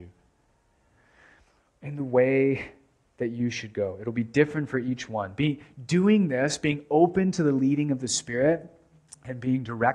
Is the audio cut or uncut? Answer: uncut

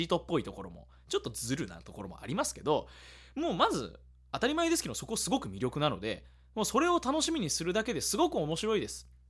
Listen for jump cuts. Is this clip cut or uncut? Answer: uncut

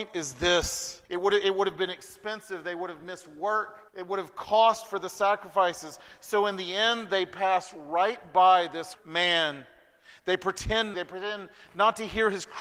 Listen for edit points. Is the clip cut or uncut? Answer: cut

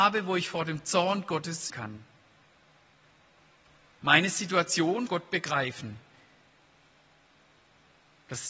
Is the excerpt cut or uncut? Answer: cut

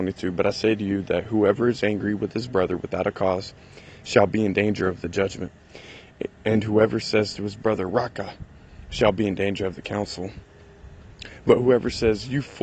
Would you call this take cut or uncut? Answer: uncut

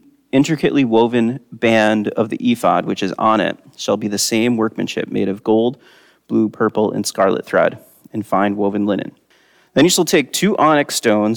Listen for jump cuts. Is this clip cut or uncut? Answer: uncut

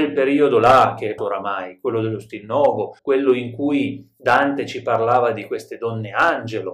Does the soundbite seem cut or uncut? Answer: cut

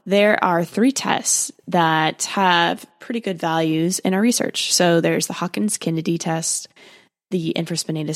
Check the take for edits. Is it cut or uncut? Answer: uncut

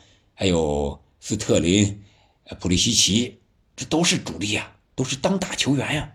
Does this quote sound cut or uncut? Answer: uncut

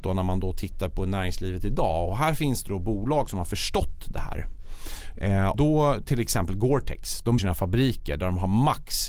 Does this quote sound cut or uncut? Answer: cut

